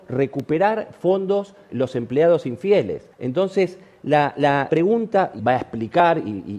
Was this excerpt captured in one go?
no; 4 cuts; at 1.7 s, 3.1 s, 4.7 s, 5.4 s

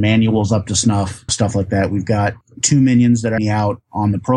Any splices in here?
yes; 2 cuts; at 1.3 s, 3.4 s

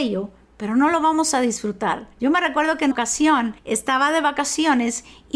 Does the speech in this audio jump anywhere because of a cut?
yes; 3 cuts; at 2.1 s, 2.9 s, 3.6 s

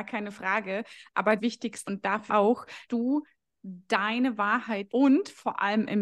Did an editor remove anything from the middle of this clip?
yes; 5 cuts; at 1.4 s, 1.9 s, 2.3 s, 2.8 s, 4.9 s

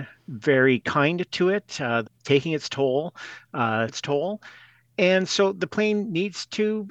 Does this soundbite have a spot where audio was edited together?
yes; 2 cuts; at 2.1 s, 3.9 s

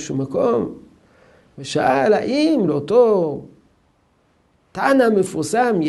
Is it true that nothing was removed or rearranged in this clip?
yes; 0 cuts

